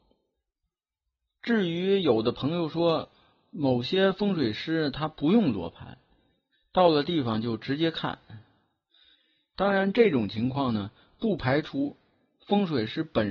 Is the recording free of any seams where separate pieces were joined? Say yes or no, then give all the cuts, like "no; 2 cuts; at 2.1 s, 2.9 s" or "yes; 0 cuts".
yes; 0 cuts